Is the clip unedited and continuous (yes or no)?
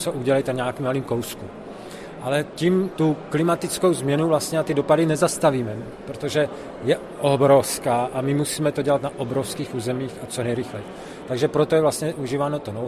yes